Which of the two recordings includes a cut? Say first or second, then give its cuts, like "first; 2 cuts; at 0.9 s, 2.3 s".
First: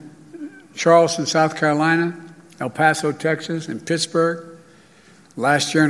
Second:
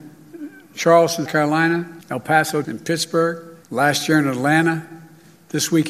second; 4 cuts; at 1.3 s, 2.0 s, 2.6 s, 3.6 s